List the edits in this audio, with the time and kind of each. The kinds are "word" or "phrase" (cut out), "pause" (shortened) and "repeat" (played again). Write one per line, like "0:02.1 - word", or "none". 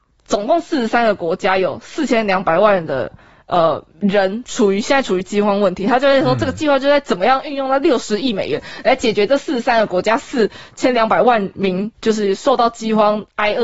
0:03.9 - pause
0:11.9 - pause

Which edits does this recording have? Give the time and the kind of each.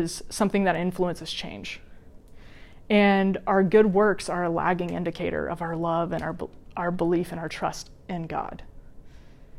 none

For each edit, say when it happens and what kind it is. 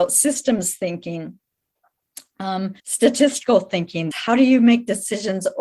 0:02.8 - pause
0:04.1 - word

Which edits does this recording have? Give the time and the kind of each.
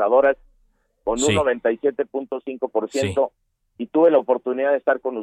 none

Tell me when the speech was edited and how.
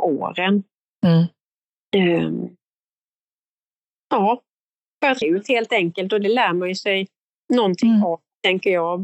0:05.2 - word
0:07.3 - word

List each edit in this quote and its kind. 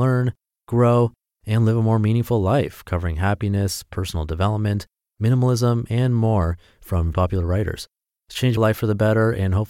0:07.1 - word
0:08.6 - word

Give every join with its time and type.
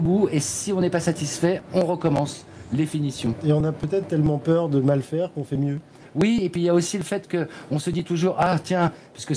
none

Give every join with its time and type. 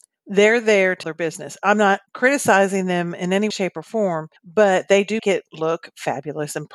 0:01.0 - word
0:02.1 - pause
0:03.5 - word
0:04.4 - pause
0:05.2 - word

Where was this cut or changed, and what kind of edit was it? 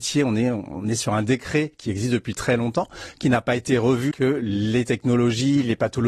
0:04.1 - word

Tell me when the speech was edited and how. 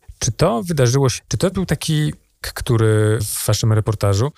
0:01.2 - word
0:01.5 - word
0:02.4 - word
0:03.2 - word

